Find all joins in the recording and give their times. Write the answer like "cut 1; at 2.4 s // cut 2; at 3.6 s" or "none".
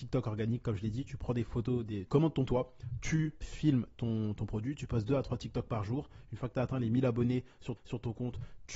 cut 1; at 2.1 s // cut 2; at 2.5 s // cut 3; at 3.4 s // cut 4; at 7.8 s